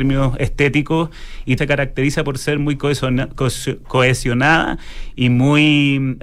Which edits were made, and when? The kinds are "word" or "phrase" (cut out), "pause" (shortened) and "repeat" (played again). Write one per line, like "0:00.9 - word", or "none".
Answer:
0:01.6 - phrase